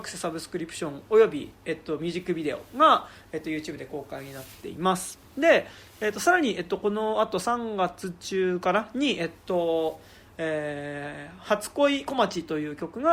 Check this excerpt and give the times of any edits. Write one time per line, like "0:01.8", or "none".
none